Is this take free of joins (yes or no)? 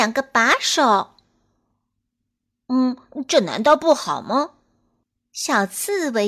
yes